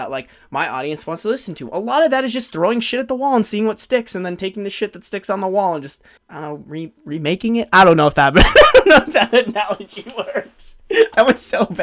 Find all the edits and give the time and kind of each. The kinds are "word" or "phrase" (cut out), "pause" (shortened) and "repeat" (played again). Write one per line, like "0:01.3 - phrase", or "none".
0:06.2 - pause